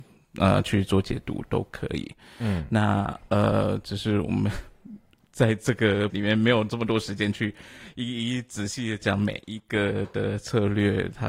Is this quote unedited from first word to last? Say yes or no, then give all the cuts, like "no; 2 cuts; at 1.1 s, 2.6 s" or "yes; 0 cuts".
no; 1 cut; at 6.1 s